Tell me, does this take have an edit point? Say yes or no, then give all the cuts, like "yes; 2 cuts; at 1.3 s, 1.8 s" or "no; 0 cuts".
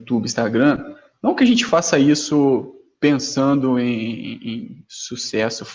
no; 0 cuts